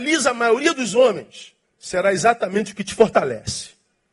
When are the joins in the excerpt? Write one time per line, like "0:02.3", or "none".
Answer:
0:01.6